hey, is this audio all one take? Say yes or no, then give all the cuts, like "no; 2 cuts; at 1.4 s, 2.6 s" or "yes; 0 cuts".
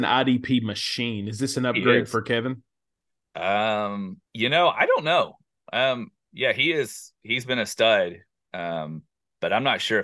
no; 1 cut; at 4.3 s